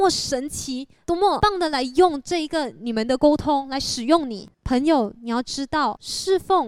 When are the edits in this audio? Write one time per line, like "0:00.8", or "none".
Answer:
0:04.5

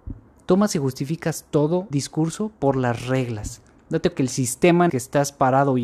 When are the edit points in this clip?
0:01.9
0:04.1
0:04.9

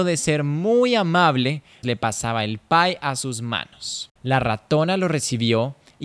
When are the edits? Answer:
0:01.8
0:04.2

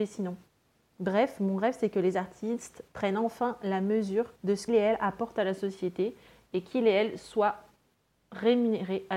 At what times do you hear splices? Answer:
0:04.4
0:04.7

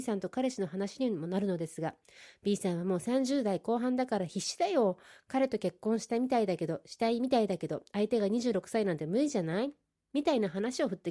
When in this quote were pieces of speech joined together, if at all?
none

